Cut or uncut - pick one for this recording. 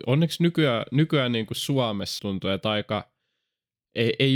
cut